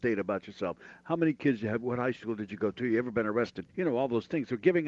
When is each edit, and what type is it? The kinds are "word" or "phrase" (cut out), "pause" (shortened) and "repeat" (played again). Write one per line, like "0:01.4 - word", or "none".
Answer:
0:03.7 - pause